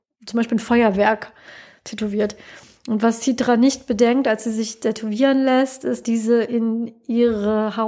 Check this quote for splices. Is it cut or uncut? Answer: cut